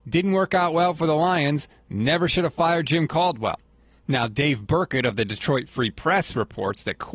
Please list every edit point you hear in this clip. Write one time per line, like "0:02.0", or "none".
none